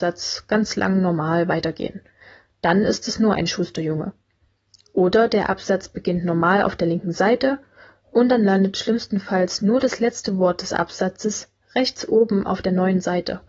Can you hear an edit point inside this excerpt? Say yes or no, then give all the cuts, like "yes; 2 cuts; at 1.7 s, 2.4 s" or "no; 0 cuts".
no; 0 cuts